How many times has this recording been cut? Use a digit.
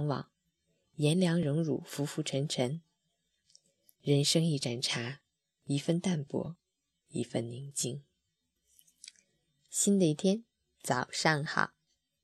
0